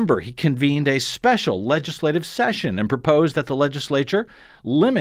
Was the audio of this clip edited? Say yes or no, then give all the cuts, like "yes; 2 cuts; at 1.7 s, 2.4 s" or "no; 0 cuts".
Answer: no; 0 cuts